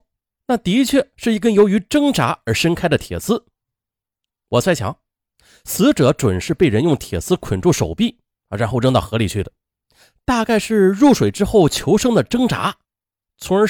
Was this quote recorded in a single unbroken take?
yes; 0 cuts

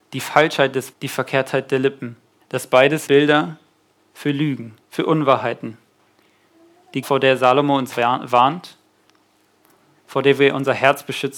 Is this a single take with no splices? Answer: no; 6 cuts; at 0.9 s, 2.4 s, 3.1 s, 4.8 s, 7.0 s, 7.9 s

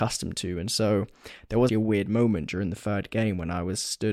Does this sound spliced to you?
yes; 1 cut; at 1.7 s

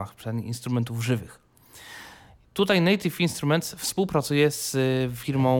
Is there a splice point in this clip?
no; 0 cuts

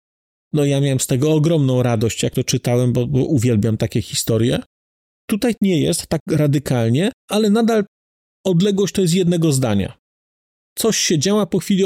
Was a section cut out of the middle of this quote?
yes; 1 cut; at 7.2 s

